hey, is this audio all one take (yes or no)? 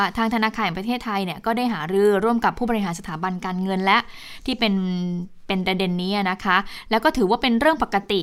yes